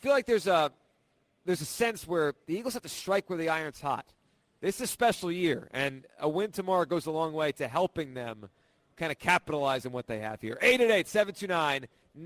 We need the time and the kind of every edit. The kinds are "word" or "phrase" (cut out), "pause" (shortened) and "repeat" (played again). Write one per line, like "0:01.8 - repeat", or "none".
none